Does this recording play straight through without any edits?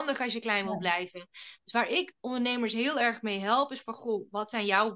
yes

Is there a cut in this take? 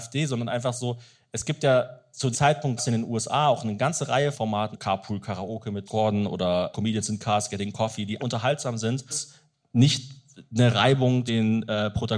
yes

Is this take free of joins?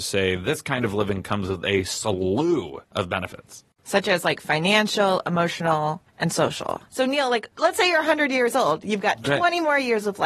no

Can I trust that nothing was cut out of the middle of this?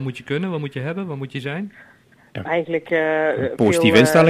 no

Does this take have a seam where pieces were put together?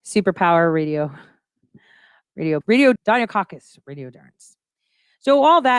yes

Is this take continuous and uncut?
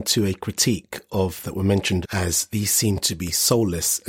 no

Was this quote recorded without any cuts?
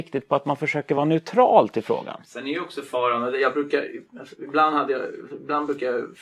yes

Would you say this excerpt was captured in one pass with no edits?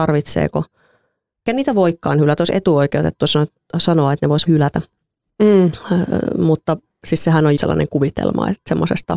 no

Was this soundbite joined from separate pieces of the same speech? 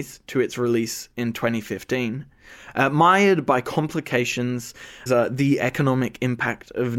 yes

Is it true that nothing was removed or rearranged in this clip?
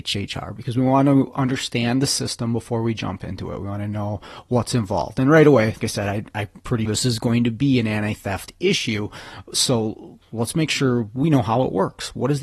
no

